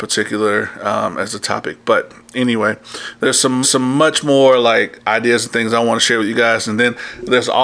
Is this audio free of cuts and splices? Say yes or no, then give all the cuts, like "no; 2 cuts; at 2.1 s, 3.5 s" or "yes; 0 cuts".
no; 1 cut; at 3.6 s